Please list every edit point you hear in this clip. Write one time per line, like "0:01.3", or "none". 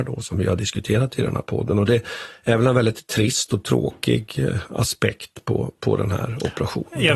none